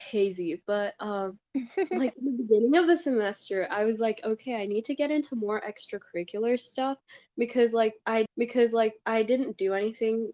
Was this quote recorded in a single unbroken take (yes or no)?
no